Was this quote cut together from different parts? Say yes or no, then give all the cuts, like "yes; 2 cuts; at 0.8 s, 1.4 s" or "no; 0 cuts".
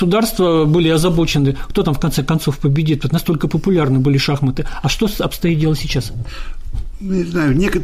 no; 0 cuts